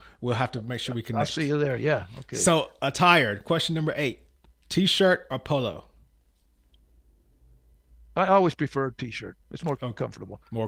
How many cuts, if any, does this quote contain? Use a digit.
1